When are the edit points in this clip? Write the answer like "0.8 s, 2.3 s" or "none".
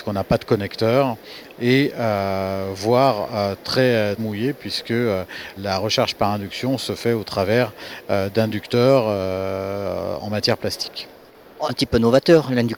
4.2 s, 5.6 s, 11.7 s